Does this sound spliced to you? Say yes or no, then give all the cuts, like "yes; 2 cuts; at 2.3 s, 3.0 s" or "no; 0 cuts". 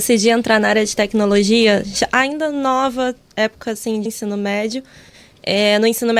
yes; 1 cut; at 4.1 s